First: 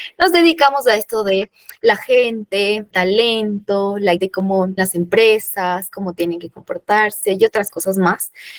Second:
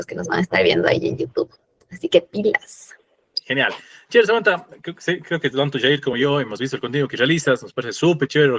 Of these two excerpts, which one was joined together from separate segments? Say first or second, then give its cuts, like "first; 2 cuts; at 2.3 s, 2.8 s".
first; 3 cuts; at 2.9 s, 4.2 s, 4.8 s